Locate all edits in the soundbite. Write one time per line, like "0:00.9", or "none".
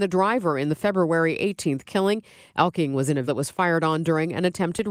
0:03.3

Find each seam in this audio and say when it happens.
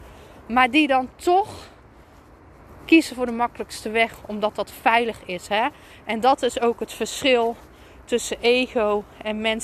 none

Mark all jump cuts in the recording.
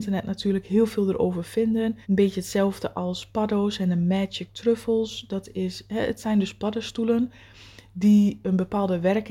0:02.0

